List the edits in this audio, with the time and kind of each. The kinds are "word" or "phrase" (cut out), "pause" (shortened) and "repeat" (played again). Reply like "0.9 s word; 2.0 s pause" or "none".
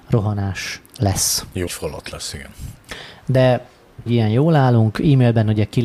1.7 s word; 4.1 s phrase